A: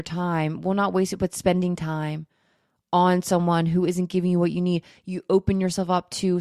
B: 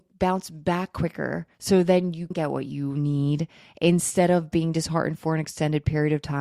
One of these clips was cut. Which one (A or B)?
B